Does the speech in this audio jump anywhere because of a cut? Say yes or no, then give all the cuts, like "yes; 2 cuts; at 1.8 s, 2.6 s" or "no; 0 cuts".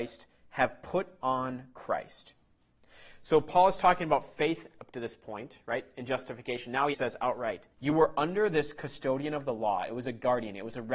yes; 2 cuts; at 6.9 s, 7.7 s